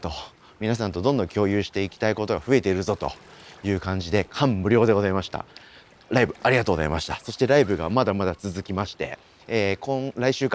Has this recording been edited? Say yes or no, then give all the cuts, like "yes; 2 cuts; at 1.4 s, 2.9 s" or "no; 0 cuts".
no; 0 cuts